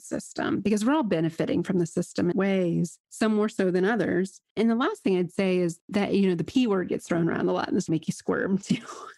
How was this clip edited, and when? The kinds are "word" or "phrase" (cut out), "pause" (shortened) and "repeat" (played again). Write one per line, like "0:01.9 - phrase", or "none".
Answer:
0:02.3 - phrase
0:04.5 - pause
0:07.9 - word